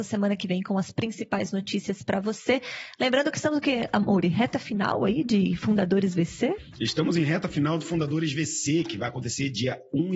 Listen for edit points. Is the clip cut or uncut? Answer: uncut